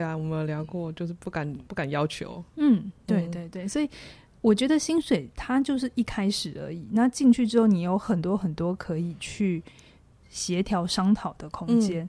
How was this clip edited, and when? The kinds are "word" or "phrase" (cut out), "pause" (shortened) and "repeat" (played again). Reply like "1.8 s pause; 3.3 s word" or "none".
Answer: 1.7 s pause

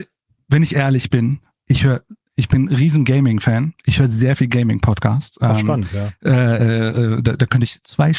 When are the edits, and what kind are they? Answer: none

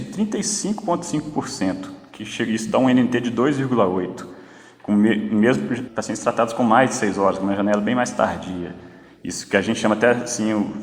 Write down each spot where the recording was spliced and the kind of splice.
5.9 s word

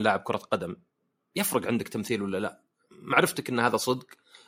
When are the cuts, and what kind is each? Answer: none

